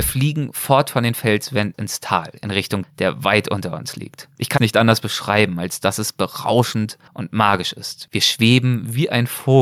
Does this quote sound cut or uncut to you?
cut